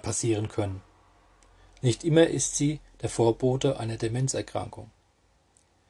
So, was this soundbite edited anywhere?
no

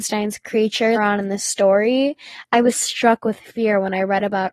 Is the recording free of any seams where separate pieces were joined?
no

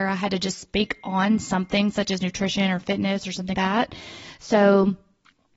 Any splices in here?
yes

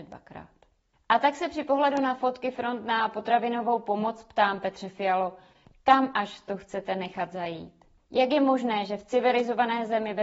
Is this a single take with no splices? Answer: yes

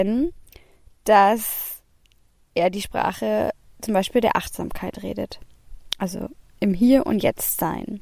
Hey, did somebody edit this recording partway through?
no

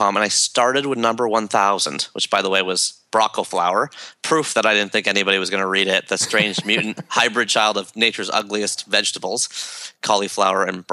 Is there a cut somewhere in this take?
no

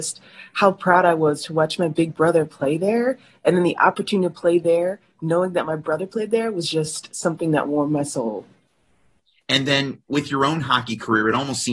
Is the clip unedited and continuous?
yes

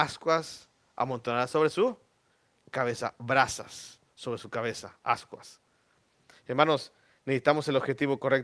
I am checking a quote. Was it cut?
no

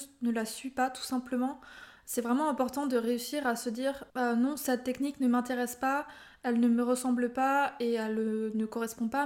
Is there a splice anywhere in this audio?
yes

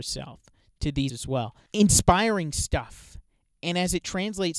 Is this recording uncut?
no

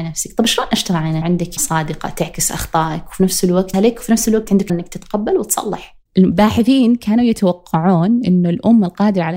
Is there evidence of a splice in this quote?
yes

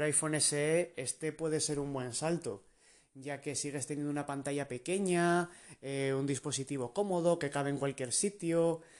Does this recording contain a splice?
no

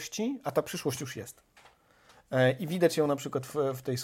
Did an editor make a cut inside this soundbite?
no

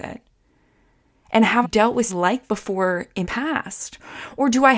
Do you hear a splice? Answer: yes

